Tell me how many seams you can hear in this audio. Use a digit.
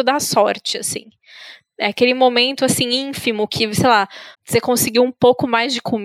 1